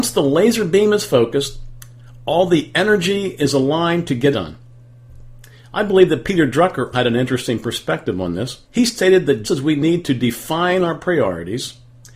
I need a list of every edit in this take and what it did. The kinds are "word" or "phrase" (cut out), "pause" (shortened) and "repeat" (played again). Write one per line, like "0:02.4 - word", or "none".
0:04.3 - word
0:06.9 - word
0:08.6 - pause
0:09.4 - word